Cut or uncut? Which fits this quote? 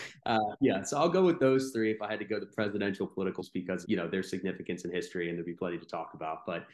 cut